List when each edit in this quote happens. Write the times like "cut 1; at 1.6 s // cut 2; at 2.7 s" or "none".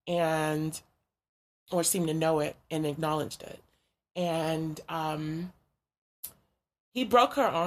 none